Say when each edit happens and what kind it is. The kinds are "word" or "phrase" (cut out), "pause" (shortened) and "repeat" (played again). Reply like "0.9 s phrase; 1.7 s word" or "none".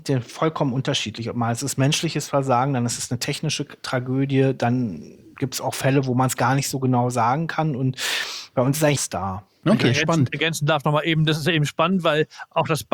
9.0 s phrase

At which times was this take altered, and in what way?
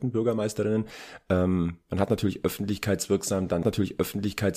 3.6 s repeat

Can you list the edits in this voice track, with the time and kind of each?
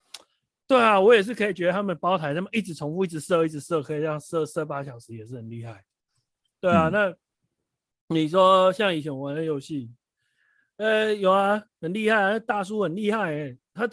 none

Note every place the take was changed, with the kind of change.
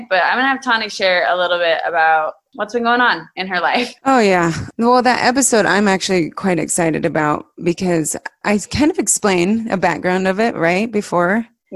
4.0 s pause

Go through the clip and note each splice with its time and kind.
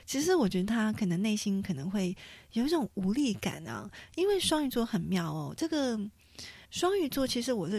6.6 s pause

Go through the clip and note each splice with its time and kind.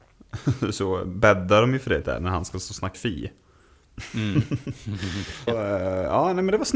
2.0 s word; 2.9 s word; 5.5 s word

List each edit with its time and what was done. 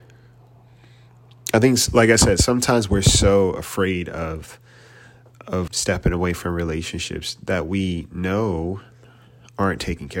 5.7 s word

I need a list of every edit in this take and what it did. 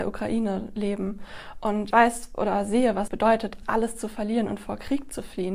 1.9 s word; 3.1 s word; 3.6 s word

